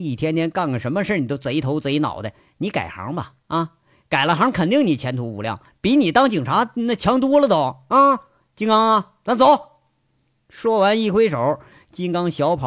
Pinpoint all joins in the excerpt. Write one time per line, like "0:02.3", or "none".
none